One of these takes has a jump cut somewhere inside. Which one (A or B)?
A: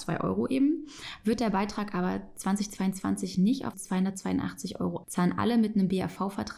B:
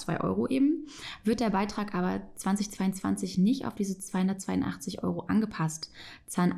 A